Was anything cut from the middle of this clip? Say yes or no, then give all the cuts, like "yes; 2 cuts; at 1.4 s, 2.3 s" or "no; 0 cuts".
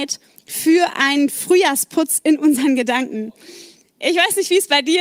no; 0 cuts